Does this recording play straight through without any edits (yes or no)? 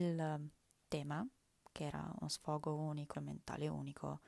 no